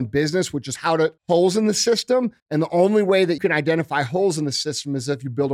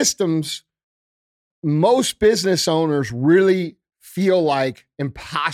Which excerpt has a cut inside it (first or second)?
first